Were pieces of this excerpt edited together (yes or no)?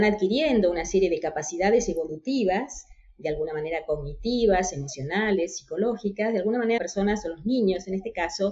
yes